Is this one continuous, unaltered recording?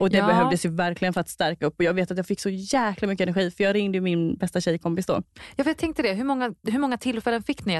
no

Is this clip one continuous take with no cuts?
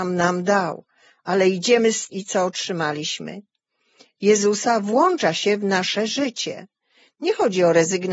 no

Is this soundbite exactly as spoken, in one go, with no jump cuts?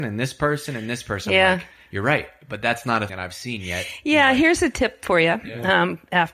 no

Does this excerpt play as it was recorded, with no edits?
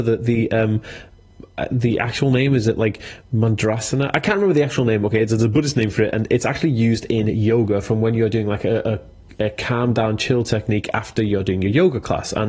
yes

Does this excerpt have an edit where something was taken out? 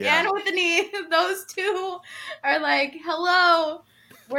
no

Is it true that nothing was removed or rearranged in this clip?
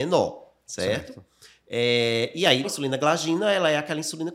no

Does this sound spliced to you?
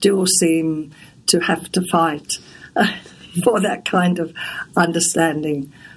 no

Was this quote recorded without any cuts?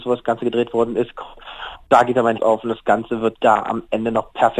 no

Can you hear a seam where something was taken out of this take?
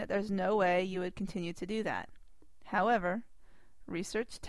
no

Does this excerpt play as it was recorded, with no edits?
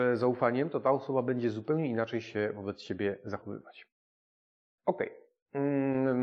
yes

